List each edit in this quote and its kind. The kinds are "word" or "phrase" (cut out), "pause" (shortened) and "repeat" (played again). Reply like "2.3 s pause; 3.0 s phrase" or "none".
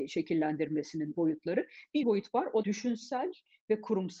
1.1 s word; 2.0 s word; 2.6 s word